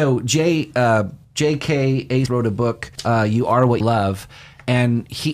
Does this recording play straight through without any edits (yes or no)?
no